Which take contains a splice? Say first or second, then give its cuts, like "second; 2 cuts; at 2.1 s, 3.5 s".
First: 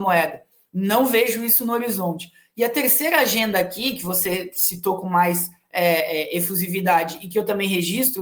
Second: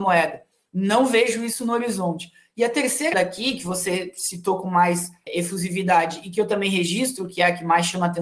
second; 2 cuts; at 3.1 s, 5.3 s